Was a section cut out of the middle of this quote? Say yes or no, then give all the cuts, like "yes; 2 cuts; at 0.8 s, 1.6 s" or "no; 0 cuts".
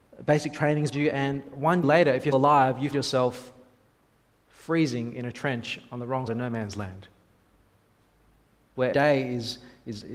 yes; 6 cuts; at 0.9 s, 1.8 s, 2.3 s, 2.9 s, 6.3 s, 8.9 s